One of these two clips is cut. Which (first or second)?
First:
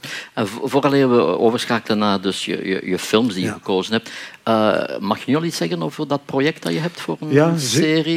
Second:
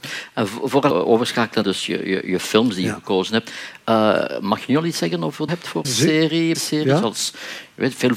second